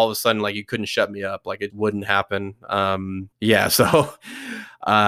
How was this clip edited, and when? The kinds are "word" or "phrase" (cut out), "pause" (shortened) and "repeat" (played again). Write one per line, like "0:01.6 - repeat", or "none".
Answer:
0:01.7 - word
0:03.3 - pause